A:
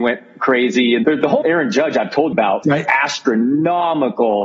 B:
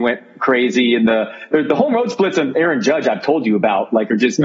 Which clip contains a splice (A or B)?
A